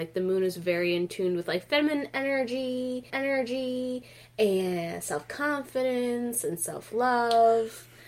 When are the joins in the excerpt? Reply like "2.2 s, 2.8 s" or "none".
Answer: 3.1 s